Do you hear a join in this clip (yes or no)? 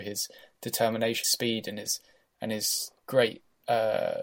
yes